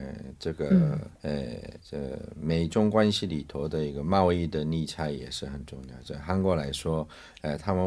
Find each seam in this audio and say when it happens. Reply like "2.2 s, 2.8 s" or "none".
1.1 s, 1.8 s